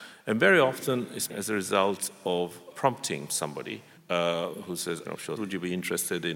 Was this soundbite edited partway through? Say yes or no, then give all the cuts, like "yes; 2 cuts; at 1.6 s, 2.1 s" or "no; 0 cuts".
yes; 6 cuts; at 1.3 s, 2.7 s, 3.3 s, 4.0 s, 5.0 s, 5.4 s